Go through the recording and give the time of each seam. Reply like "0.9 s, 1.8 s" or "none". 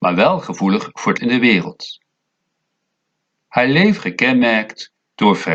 1.2 s, 4.0 s